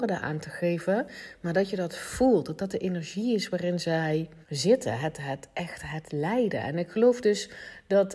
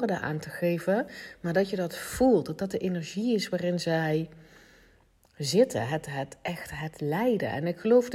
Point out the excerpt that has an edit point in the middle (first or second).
first